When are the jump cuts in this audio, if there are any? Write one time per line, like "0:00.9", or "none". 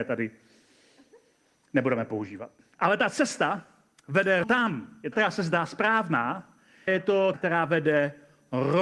0:04.4
0:05.1
0:06.9
0:07.3